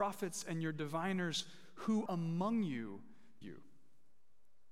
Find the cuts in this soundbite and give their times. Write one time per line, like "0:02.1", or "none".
0:02.1
0:03.4